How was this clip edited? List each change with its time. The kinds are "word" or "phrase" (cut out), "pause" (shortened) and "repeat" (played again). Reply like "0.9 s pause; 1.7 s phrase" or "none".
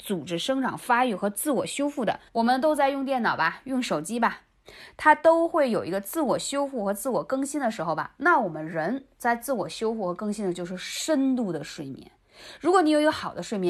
2.3 s pause